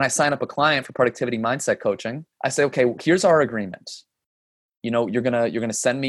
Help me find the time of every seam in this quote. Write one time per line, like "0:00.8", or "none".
0:02.3